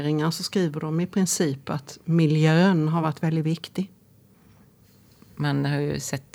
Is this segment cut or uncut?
uncut